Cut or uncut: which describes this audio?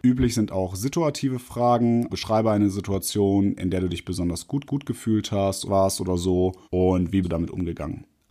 cut